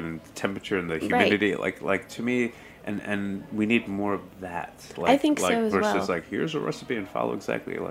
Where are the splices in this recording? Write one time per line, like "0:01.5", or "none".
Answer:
none